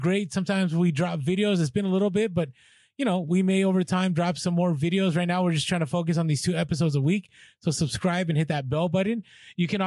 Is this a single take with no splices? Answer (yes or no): yes